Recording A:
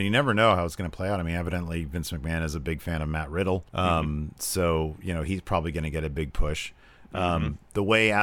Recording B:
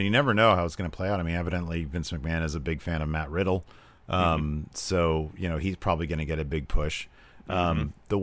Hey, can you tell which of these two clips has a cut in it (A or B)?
A